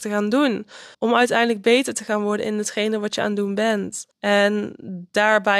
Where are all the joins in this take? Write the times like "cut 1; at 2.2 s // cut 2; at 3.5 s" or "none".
cut 1; at 0.9 s // cut 2; at 4.1 s